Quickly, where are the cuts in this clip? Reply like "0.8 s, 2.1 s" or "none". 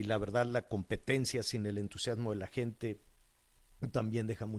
none